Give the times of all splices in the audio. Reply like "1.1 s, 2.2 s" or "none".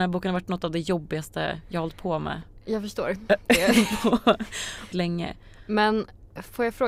4.9 s